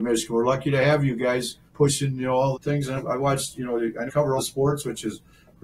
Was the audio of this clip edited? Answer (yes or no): yes